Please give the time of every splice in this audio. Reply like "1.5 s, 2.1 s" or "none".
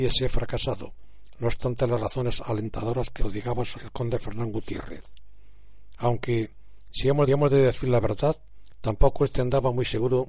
3.2 s, 3.7 s, 7.3 s